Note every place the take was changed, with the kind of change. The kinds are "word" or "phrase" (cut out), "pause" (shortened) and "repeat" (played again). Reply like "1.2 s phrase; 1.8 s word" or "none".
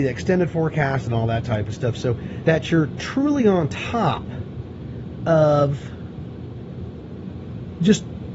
2.4 s phrase